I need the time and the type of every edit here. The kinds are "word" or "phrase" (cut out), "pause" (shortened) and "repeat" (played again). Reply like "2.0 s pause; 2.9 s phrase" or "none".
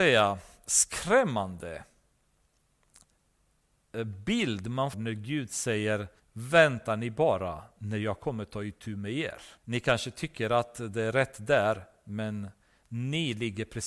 4.9 s word; 6.2 s pause; 9.6 s pause

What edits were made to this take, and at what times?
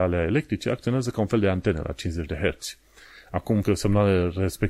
3.6 s word

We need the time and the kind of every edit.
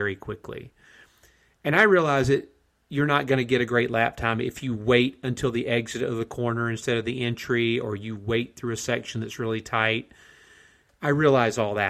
none

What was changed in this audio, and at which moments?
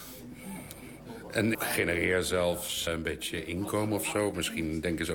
1.5 s word; 2.9 s word

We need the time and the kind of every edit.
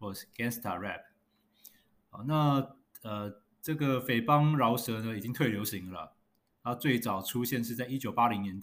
none

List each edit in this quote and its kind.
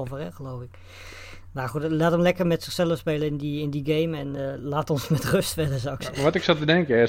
none

